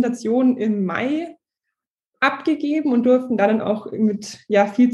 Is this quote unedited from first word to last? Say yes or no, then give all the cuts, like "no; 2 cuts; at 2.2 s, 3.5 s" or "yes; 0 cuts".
yes; 0 cuts